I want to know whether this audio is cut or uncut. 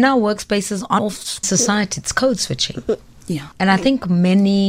cut